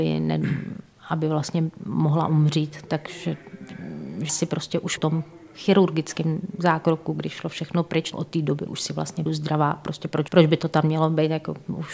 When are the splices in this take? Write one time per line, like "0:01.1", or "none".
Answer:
0:04.3
0:05.0
0:08.1
0:09.3
0:10.3